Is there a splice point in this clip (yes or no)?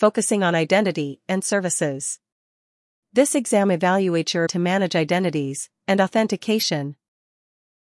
yes